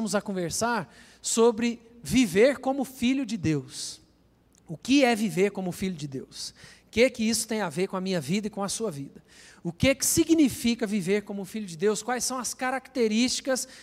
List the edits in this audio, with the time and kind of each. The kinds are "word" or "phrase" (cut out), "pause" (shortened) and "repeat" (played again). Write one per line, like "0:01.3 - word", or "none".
none